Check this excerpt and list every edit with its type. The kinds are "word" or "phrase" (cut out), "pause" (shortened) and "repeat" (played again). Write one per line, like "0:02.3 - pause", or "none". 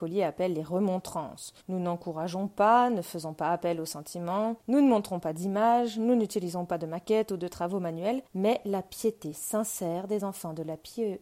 0:01.6 - pause
0:04.6 - pause
0:08.3 - pause